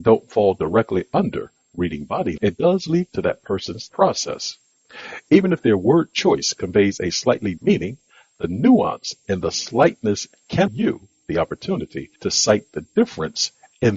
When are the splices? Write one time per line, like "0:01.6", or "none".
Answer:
0:02.4
0:03.1
0:03.9
0:07.6
0:10.7
0:12.2